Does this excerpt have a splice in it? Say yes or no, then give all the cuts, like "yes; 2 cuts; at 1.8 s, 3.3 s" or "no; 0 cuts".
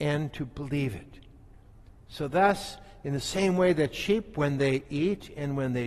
no; 0 cuts